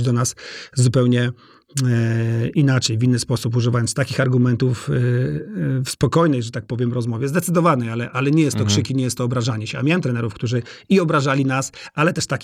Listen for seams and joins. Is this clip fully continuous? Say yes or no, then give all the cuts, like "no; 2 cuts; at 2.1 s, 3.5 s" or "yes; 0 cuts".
yes; 0 cuts